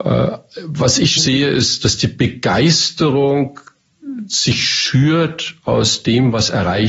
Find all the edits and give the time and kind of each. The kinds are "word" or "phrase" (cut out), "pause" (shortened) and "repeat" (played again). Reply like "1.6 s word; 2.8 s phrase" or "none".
1.2 s word